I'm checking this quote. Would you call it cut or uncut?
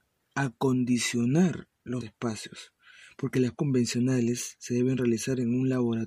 cut